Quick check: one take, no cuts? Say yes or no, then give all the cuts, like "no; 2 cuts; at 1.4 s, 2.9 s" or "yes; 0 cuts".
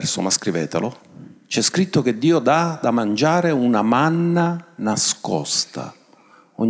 yes; 0 cuts